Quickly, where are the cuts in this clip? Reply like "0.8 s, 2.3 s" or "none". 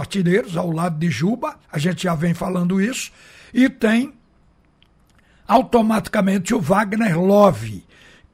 1.6 s